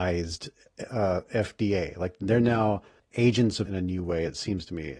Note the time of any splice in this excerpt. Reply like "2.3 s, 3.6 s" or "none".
3.0 s, 3.7 s

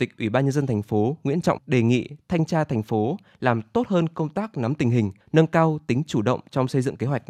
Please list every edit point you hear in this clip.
1.6 s, 5.2 s

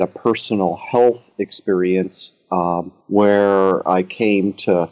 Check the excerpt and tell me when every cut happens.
3.0 s

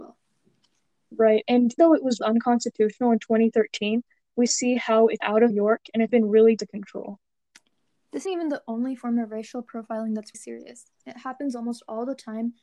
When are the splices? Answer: 1.8 s, 2.2 s, 4.5 s, 5.2 s, 5.5 s, 6.1 s, 6.6 s, 8.3 s, 10.3 s

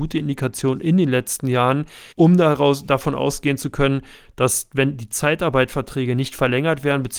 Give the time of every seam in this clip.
2.1 s

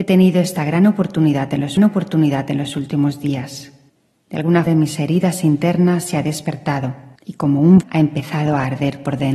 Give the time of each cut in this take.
1.8 s, 3.9 s, 4.7 s, 7.2 s, 7.8 s

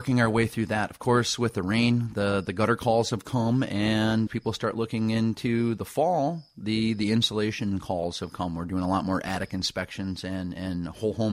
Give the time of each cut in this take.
4.3 s

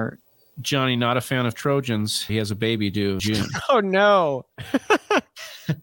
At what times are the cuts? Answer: 2.3 s, 3.2 s

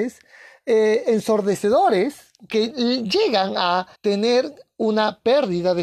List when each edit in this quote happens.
4.0 s

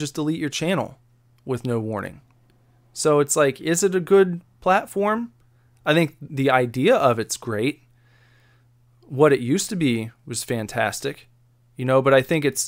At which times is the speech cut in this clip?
none

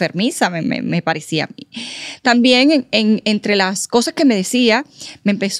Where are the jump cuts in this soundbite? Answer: none

